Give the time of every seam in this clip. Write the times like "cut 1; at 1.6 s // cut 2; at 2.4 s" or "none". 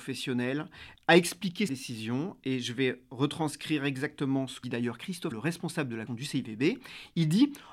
cut 1; at 1.7 s // cut 2; at 4.6 s // cut 3; at 5.3 s // cut 4; at 6.1 s

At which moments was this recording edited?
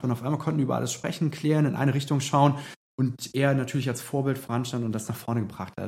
none

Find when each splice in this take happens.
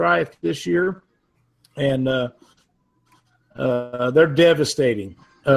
none

